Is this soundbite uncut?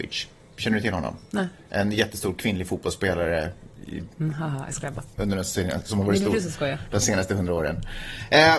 yes; 0 cuts

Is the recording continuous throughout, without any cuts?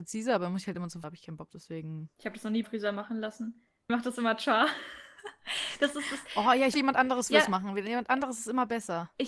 no; 5 cuts; at 1.0 s, 1.5 s, 2.6 s, 3.9 s, 6.7 s

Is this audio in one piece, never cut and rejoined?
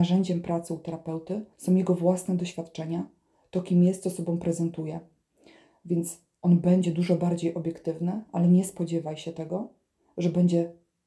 no; 1 cut; at 1.5 s

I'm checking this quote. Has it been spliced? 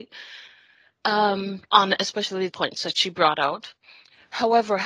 yes; 2 cuts; at 1.7 s, 2.5 s

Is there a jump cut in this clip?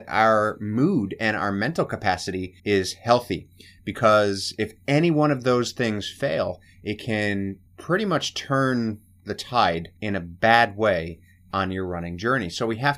yes; 3 cuts; at 2.6 s, 7.7 s, 10.0 s

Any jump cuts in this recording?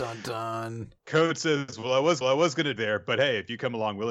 yes; 3 cuts; at 1.0 s, 2.2 s, 2.8 s

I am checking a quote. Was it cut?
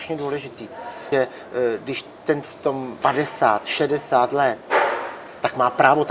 yes; 3 cuts; at 1.1 s, 2.4 s, 3.0 s

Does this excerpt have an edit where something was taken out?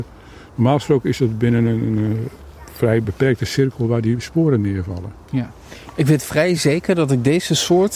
no; 0 cuts

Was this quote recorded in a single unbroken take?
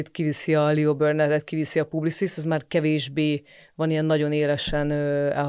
yes; 0 cuts

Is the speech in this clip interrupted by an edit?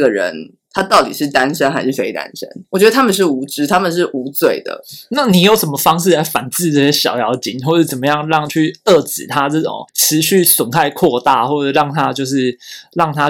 yes; 1 cut; at 9.9 s

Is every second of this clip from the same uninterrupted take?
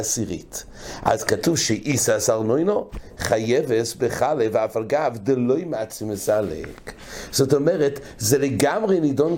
yes; 0 cuts

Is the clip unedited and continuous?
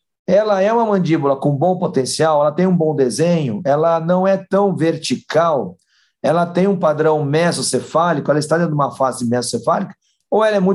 yes; 0 cuts

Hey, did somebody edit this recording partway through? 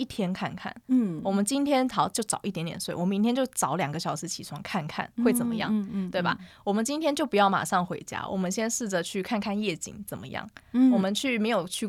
yes; 1 cut; at 5.1 s

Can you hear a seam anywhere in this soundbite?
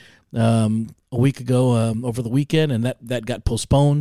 no; 0 cuts

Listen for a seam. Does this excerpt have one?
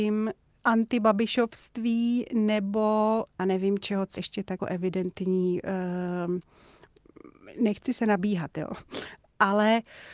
yes; 4 cuts; at 3.4 s, 4.2 s, 4.6 s, 8.0 s

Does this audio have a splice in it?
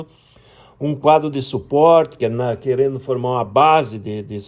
no; 0 cuts

